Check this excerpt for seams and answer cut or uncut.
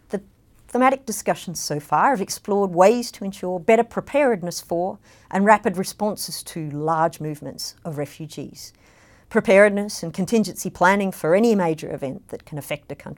uncut